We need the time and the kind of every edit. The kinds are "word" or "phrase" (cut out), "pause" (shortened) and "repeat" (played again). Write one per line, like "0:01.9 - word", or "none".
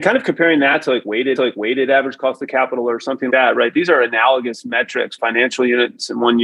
0:01.4 - repeat
0:03.3 - word
0:05.2 - phrase